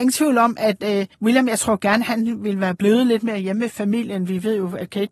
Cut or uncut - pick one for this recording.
cut